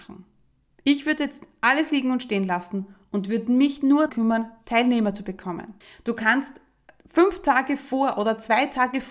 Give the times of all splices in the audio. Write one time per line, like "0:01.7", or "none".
0:04.1
0:05.8